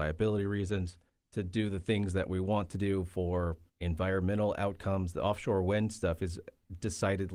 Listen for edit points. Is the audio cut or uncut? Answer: cut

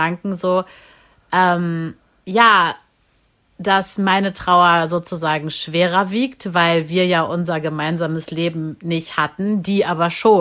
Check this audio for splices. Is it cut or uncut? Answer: uncut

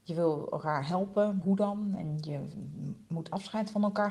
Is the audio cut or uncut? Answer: cut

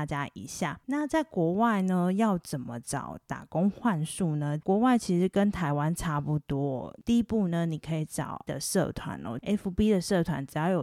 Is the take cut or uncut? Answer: cut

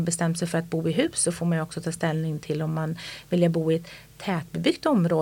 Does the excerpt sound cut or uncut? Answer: uncut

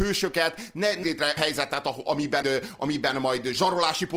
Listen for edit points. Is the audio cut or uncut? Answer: cut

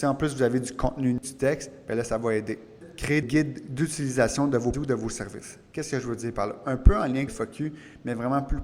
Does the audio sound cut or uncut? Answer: cut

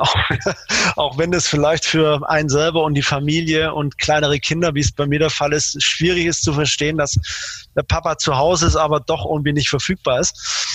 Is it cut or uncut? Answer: uncut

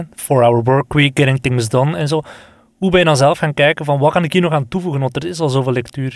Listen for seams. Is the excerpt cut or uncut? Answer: uncut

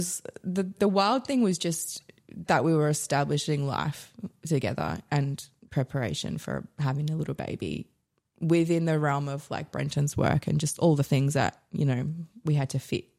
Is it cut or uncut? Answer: uncut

